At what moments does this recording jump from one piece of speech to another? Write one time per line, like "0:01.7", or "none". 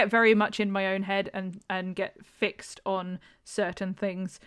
none